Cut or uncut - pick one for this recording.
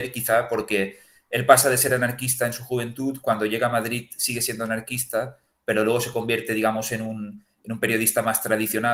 uncut